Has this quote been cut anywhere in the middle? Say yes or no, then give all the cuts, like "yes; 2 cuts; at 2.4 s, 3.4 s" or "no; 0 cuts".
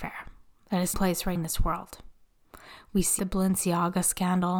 yes; 3 cuts; at 0.9 s, 1.4 s, 3.2 s